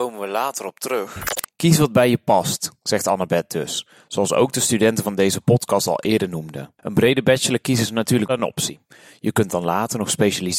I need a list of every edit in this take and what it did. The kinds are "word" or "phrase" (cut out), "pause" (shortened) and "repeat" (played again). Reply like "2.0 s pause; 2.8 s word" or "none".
none